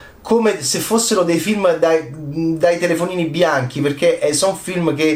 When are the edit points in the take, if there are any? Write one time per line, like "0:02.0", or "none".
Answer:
none